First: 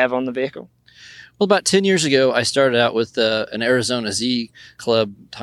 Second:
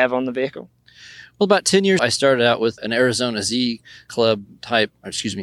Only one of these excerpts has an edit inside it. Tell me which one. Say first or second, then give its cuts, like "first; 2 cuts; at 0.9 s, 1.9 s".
second; 2 cuts; at 2.0 s, 2.8 s